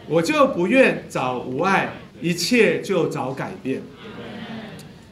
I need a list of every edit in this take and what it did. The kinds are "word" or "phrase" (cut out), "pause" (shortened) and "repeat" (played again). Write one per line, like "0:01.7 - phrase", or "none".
0:02.1 - pause

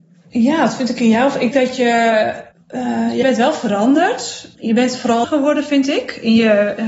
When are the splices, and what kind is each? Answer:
0:01.5 - word
0:02.5 - pause
0:03.2 - word
0:04.5 - pause
0:05.2 - phrase

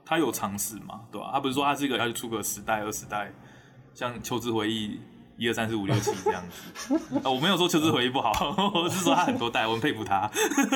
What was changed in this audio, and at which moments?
0:02.0 - word

